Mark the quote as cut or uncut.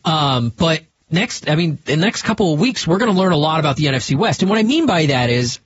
uncut